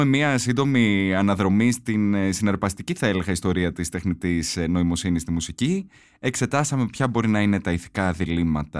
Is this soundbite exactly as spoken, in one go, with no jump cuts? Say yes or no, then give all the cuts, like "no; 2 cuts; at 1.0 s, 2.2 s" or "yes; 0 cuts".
yes; 0 cuts